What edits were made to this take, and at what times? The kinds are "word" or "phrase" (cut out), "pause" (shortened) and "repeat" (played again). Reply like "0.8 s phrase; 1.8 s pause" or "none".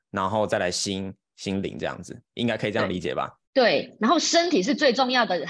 3.5 s pause